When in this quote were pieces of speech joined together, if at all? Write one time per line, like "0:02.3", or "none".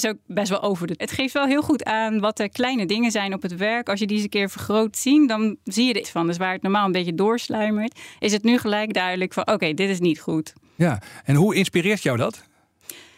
0:01.0
0:04.9
0:06.0